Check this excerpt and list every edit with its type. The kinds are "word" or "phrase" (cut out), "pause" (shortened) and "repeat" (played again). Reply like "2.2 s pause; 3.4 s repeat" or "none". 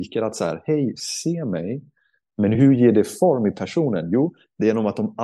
none